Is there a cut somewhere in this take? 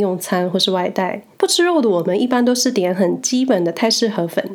yes; 1 cut; at 1.3 s

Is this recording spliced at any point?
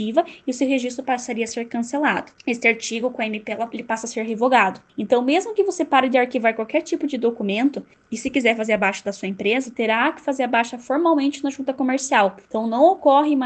no; 0 cuts

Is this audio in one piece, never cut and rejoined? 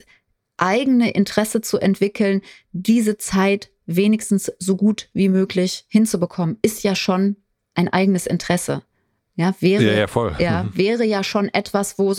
yes; 0 cuts

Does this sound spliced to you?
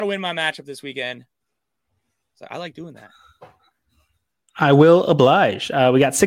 no; 0 cuts

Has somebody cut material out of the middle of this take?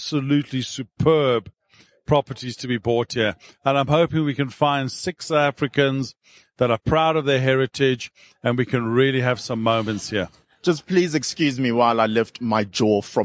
no; 0 cuts

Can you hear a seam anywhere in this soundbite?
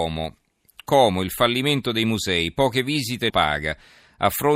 yes; 1 cut; at 3.3 s

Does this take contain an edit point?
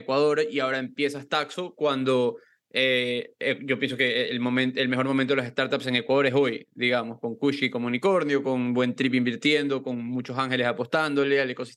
no; 0 cuts

